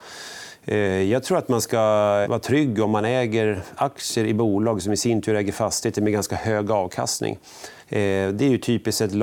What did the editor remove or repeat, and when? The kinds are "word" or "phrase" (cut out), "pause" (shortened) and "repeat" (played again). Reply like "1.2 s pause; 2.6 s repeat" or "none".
2.2 s word; 7.8 s pause